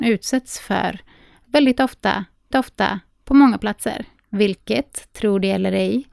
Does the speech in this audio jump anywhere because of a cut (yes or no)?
yes